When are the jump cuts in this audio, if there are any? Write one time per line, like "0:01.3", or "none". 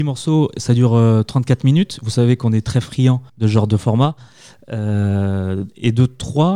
0:03.3